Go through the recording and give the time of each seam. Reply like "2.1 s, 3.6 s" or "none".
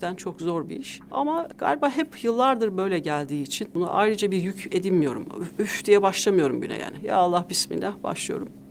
none